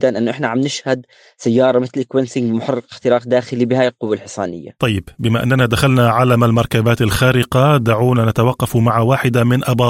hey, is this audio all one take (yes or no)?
yes